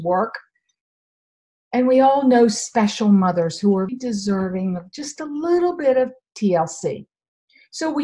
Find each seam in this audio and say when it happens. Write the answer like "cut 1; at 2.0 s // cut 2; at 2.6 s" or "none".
cut 1; at 3.9 s